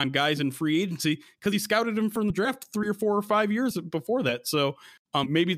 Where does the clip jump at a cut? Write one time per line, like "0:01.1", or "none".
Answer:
none